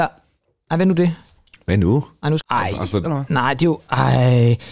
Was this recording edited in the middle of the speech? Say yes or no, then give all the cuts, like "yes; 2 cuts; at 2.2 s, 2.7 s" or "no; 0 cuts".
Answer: yes; 2 cuts; at 2.4 s, 3.0 s